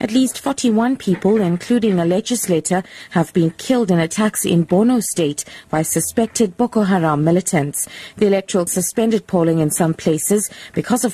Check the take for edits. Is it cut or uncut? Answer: cut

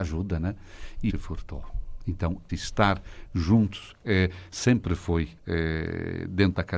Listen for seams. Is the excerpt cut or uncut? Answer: cut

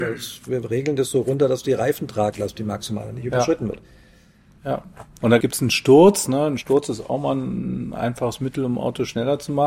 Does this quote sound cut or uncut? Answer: uncut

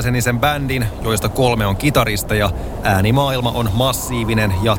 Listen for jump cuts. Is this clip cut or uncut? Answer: uncut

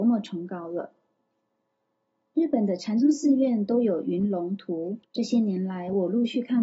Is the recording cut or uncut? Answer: cut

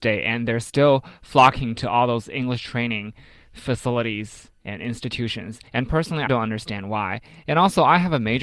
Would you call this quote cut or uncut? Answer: cut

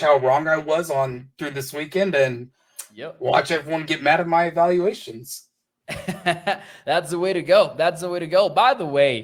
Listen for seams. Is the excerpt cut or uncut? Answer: uncut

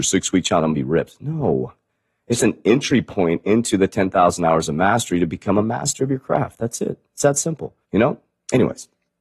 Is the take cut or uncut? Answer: cut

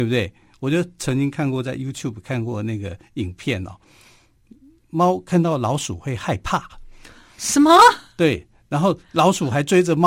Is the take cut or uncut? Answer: uncut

